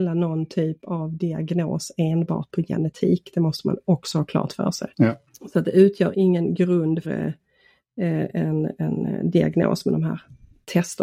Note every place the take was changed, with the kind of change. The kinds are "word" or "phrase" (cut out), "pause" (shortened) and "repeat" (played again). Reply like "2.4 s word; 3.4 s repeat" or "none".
4.9 s pause; 6.1 s word; 7.0 s word